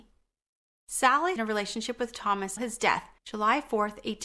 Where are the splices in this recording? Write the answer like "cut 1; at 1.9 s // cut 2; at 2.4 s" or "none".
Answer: cut 1; at 1.4 s // cut 2; at 2.6 s // cut 3; at 3.2 s